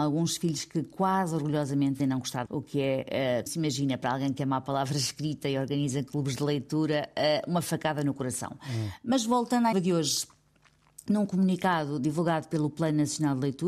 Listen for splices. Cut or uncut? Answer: cut